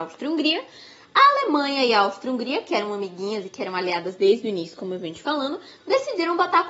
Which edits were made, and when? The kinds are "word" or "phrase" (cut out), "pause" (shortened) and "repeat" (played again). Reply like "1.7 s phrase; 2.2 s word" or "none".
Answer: none